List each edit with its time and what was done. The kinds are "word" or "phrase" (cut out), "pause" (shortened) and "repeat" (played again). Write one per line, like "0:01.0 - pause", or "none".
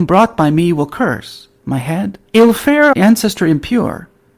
0:02.3 - pause
0:02.9 - word